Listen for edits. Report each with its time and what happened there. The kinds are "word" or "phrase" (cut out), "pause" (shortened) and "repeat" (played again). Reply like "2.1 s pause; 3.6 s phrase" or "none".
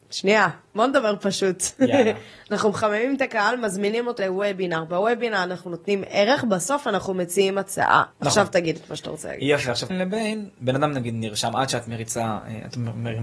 4.2 s word; 8.1 s pause; 9.9 s phrase